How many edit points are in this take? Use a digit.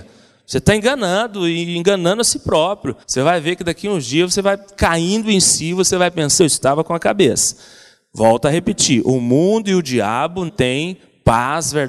3